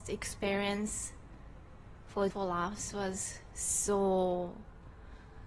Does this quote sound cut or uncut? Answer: cut